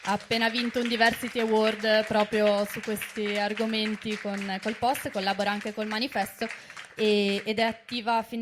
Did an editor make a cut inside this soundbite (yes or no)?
no